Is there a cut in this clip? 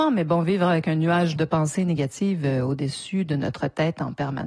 yes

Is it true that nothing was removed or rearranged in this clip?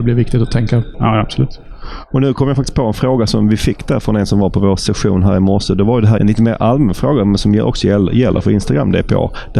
no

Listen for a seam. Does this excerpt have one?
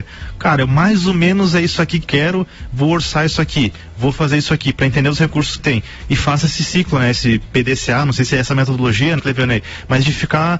yes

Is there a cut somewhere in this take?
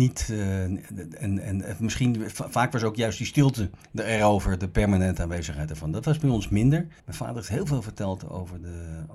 yes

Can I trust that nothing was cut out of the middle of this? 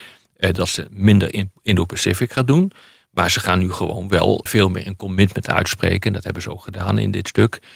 no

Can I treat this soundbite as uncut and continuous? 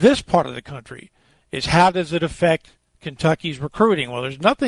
no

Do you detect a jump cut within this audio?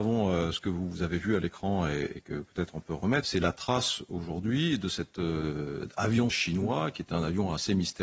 yes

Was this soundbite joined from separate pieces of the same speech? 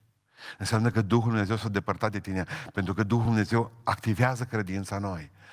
no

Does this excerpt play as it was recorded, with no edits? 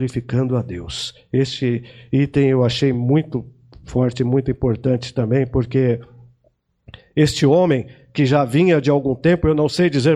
yes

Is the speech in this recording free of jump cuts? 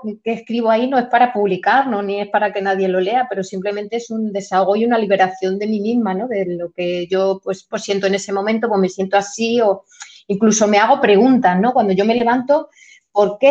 no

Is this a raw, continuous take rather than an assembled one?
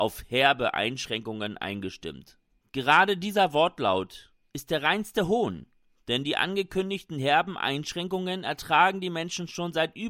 yes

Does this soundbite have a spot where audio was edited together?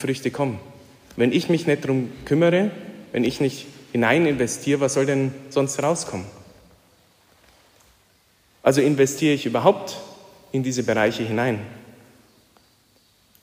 no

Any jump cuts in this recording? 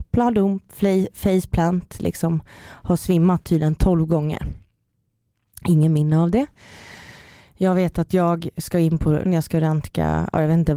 yes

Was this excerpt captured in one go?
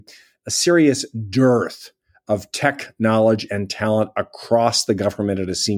yes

